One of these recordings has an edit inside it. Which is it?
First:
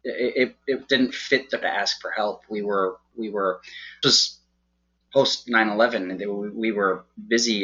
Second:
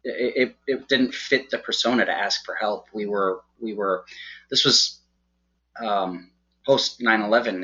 first; 3 cuts; at 1.6 s, 4.0 s, 5.0 s

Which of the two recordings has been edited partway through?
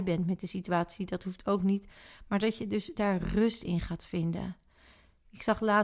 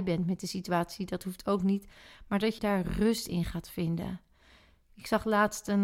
second; 1 cut; at 2.6 s

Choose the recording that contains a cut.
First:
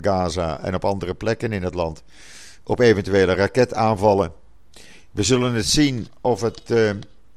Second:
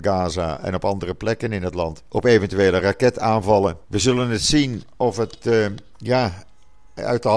second; 3 cuts; at 2.1 s, 3.8 s, 5.9 s

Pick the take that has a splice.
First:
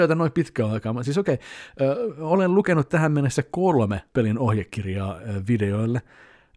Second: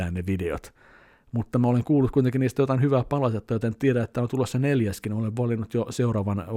first; 1 cut; at 4.1 s

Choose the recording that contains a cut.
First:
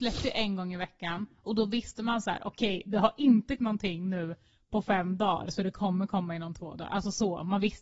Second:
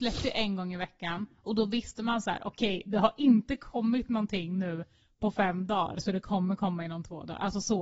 first; 1 cut; at 3.6 s

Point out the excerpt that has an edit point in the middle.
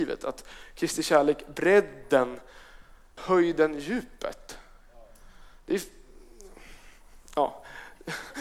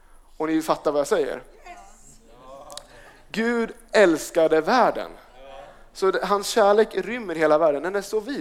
first; 1 cut; at 3.2 s

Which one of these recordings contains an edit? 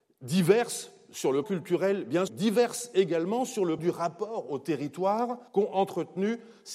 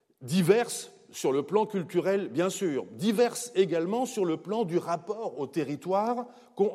first; 4 cuts; at 1.4 s, 2.3 s, 3.8 s, 5.5 s

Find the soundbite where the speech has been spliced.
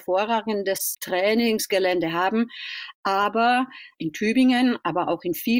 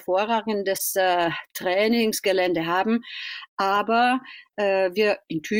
first; 2 cuts; at 0.9 s, 3.9 s

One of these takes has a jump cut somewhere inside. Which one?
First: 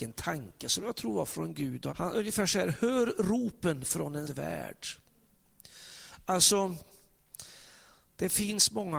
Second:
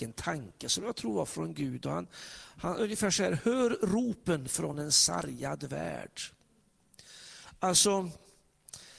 first; 2 cuts; at 1.9 s, 4.2 s

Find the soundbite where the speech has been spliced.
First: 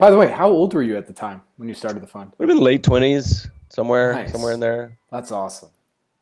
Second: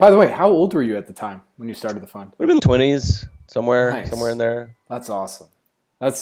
second; 1 cut; at 2.6 s

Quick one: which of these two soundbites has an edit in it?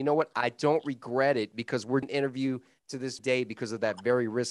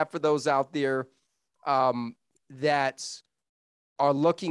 first; 2 cuts; at 2.0 s, 3.2 s

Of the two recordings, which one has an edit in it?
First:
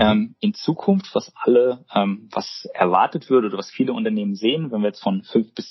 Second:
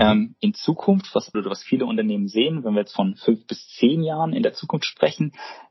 second; 1 cut; at 1.3 s

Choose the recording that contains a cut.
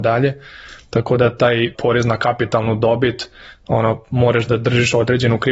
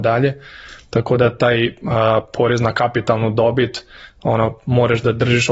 first; 1 cut; at 1.7 s

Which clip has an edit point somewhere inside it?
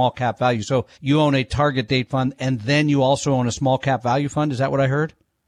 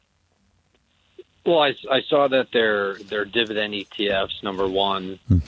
first; 1 cut; at 0.9 s

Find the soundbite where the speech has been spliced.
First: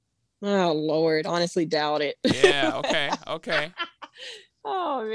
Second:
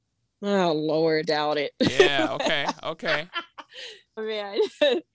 second; 2 cuts; at 1.2 s, 4.2 s

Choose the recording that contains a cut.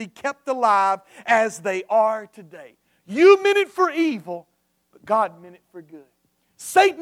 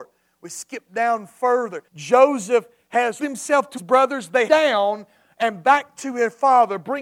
second; 4 cuts; at 1.9 s, 3.2 s, 3.8 s, 4.5 s

